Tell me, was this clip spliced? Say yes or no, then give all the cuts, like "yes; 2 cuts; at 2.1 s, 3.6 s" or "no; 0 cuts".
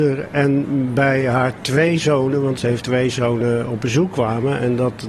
no; 0 cuts